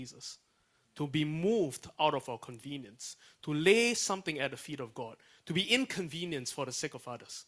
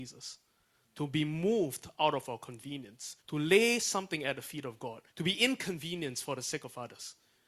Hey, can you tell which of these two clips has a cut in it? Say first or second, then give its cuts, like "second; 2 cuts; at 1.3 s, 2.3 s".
second; 2 cuts; at 3.2 s, 5.1 s